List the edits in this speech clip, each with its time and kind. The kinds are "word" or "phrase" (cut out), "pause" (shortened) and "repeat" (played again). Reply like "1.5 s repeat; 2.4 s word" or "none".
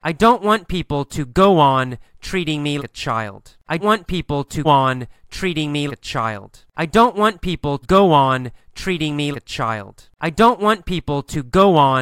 2.8 s word; 3.8 s word; 4.6 s word; 5.9 s word; 7.8 s word; 9.3 s word